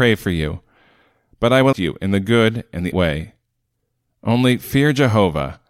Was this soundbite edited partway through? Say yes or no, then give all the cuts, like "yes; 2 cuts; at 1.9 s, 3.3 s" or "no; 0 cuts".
yes; 2 cuts; at 1.7 s, 2.9 s